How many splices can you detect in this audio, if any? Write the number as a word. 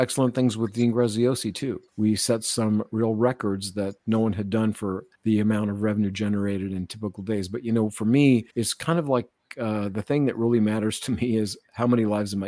four